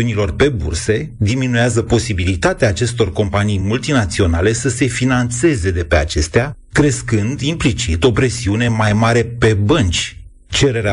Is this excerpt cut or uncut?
uncut